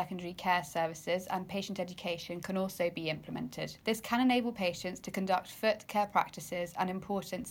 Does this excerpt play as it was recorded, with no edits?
no; 1 cut; at 3.8 s

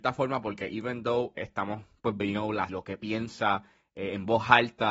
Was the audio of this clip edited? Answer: yes; 3 cuts; at 1.4 s, 2.2 s, 2.7 s

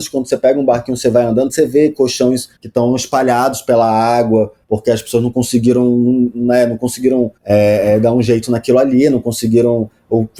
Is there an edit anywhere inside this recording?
yes; 3 cuts; at 2.6 s, 4.6 s, 7.4 s

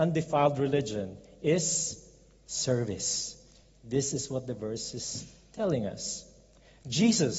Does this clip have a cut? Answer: no; 0 cuts

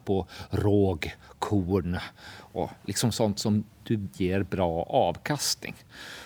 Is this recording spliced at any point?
yes; 1 cut; at 4.1 s

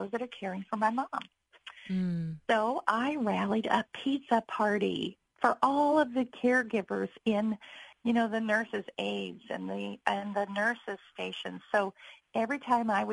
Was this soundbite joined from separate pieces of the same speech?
no; 0 cuts

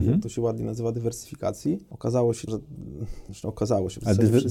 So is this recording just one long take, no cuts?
no; 1 cut; at 2.5 s

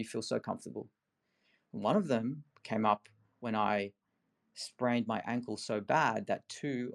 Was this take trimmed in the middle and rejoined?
no; 0 cuts

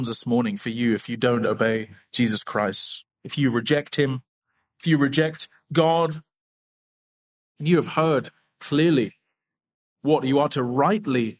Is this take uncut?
yes; 0 cuts

